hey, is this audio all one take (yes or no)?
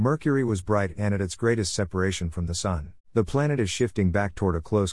no